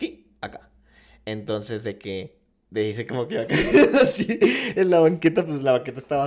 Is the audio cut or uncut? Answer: uncut